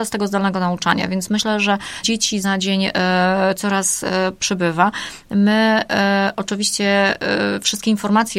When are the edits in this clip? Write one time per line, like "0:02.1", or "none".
0:02.0
0:02.4